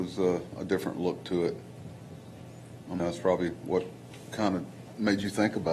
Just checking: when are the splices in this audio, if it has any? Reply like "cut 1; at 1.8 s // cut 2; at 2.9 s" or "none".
cut 1; at 3.0 s